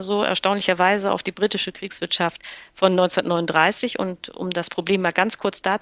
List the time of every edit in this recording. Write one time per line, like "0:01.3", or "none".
none